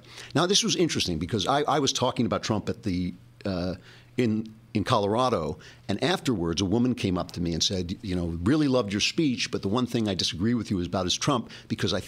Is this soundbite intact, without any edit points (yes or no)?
yes